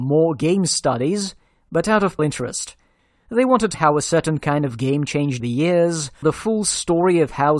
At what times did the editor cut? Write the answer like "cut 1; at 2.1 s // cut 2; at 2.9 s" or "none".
cut 1; at 2.2 s // cut 2; at 3.7 s // cut 3; at 5.4 s // cut 4; at 6.2 s